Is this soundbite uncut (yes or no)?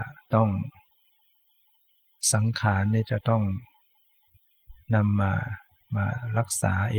yes